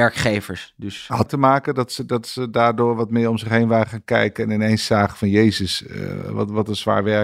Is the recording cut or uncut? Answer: cut